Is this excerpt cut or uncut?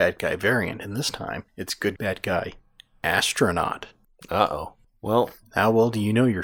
cut